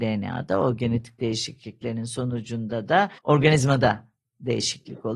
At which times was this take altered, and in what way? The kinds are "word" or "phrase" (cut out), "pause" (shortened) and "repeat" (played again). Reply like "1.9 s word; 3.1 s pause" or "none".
3.2 s pause